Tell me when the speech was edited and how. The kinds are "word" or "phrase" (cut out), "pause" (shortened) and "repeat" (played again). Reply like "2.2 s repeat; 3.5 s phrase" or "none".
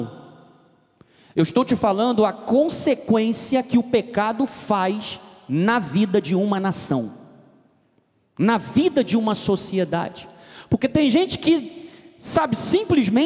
none